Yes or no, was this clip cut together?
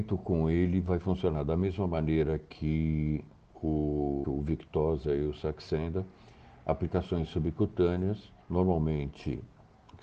yes